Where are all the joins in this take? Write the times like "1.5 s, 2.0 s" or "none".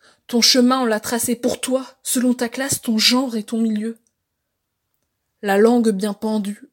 none

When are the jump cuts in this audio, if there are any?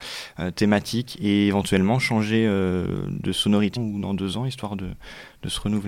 3.8 s

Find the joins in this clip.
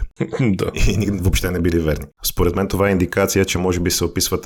2.1 s

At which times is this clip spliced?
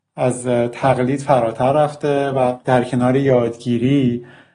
none

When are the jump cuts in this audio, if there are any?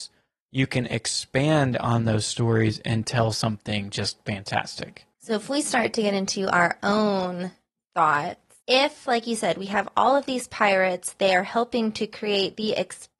5.1 s, 8.6 s

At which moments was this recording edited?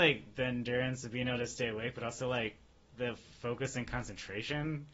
none

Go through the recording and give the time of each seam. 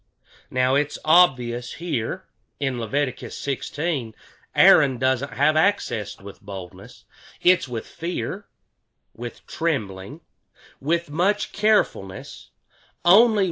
6.2 s

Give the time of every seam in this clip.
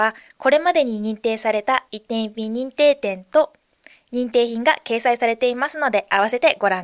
none

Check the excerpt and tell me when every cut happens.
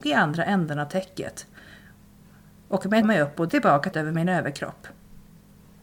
3.0 s, 3.5 s, 3.9 s

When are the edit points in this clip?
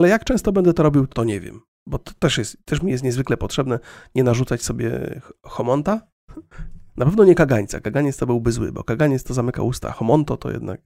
1.1 s, 6.9 s

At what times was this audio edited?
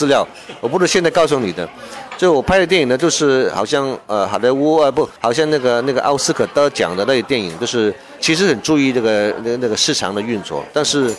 5.2 s, 8.2 s

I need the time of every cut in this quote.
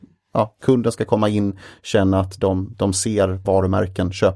3.4 s

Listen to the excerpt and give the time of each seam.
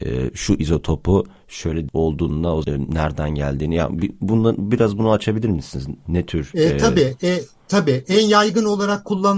1.9 s, 2.6 s

